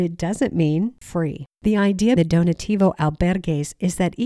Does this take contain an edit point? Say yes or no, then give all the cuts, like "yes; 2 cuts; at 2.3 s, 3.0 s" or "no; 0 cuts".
yes; 3 cuts; at 1.0 s, 1.5 s, 2.2 s